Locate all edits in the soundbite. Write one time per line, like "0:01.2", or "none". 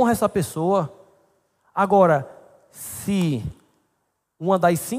none